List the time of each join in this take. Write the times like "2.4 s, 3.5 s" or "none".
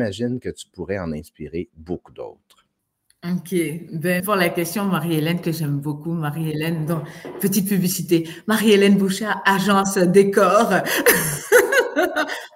4.2 s